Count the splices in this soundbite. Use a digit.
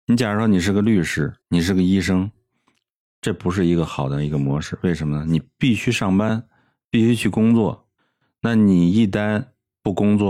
1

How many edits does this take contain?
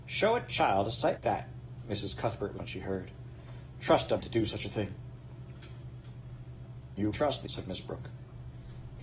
5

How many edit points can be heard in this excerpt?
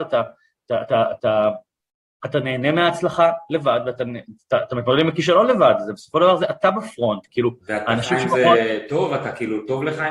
0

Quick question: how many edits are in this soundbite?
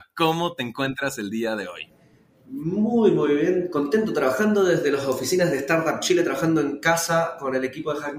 0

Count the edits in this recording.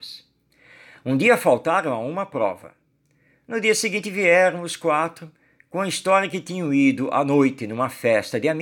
0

